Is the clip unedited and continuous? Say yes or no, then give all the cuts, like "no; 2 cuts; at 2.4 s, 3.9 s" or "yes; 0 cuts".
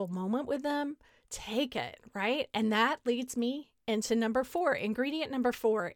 yes; 0 cuts